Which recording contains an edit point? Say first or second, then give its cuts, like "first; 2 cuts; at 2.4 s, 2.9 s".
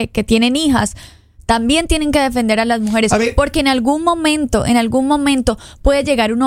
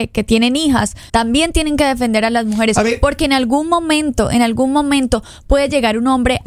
second; 1 cut; at 1.1 s